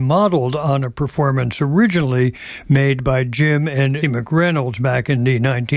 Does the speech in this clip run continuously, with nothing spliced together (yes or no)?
no